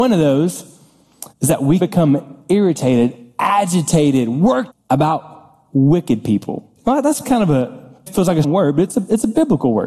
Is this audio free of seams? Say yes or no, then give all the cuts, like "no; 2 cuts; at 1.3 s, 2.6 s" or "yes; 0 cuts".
no; 7 cuts; at 1.3 s, 1.8 s, 4.7 s, 6.8 s, 7.2 s, 8.1 s, 8.4 s